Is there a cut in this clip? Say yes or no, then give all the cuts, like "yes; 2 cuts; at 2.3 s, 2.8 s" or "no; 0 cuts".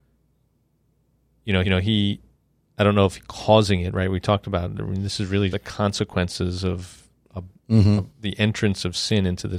yes; 4 cuts; at 1.6 s, 3.2 s, 5.5 s, 8.1 s